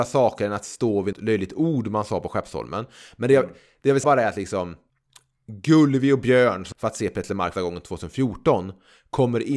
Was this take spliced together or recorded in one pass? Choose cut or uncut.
cut